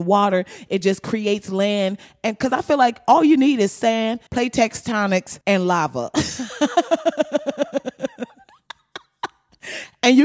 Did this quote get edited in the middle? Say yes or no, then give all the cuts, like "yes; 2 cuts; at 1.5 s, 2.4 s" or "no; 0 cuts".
yes; 2 cuts; at 4.3 s, 5.4 s